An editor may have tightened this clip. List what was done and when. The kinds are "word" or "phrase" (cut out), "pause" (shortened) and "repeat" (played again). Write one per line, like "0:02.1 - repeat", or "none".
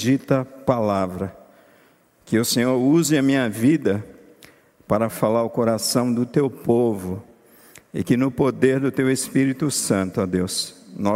none